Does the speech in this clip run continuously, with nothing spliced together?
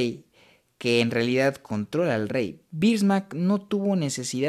yes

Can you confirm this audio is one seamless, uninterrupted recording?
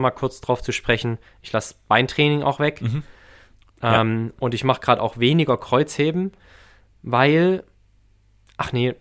yes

